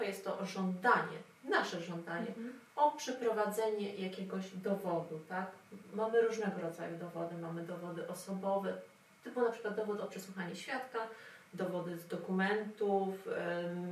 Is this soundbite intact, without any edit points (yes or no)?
yes